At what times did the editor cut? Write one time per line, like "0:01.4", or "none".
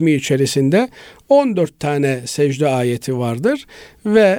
none